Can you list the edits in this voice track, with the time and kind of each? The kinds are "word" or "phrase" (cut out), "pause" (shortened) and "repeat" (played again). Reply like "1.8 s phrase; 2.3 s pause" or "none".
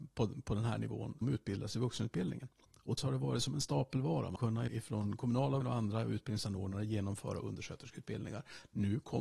1.2 s word; 3.0 s word; 4.4 s word; 4.7 s word; 5.6 s word